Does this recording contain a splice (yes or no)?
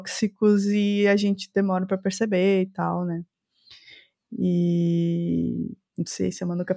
no